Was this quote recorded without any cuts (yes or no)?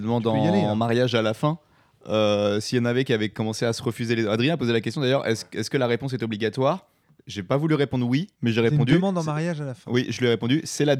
no